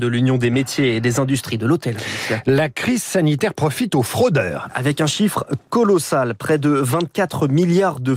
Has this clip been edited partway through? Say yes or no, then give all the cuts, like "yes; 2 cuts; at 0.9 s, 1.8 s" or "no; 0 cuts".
no; 0 cuts